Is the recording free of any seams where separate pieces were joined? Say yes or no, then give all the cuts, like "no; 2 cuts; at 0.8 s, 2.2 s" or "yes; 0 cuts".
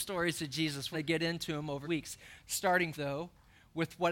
no; 3 cuts; at 0.9 s, 1.8 s, 2.9 s